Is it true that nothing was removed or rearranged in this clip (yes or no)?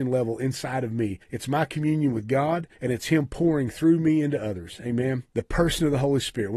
no